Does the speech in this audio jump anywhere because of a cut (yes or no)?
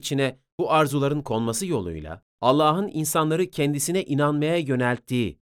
yes